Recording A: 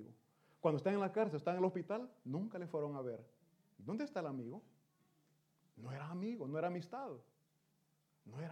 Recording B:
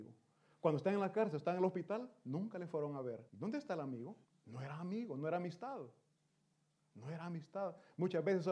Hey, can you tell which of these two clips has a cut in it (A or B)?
B